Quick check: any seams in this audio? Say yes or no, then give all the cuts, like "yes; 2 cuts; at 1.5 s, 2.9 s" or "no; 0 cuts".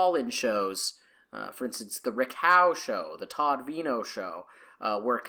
no; 0 cuts